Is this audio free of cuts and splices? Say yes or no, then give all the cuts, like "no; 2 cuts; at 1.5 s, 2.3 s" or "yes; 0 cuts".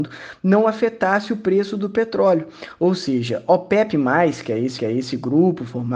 no; 1 cut; at 4.8 s